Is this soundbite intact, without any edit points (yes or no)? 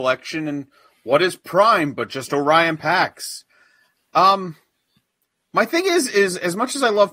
yes